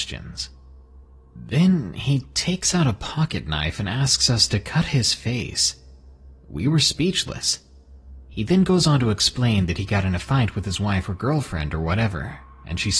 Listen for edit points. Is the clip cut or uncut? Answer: uncut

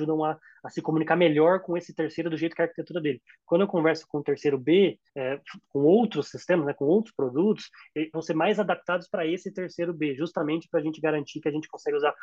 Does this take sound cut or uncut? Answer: cut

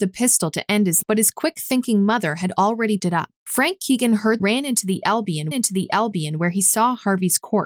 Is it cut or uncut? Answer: cut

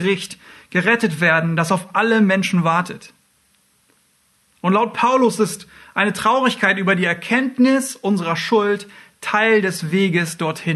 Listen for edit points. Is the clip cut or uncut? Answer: uncut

